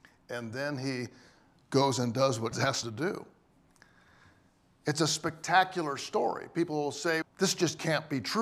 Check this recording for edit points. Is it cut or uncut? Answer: cut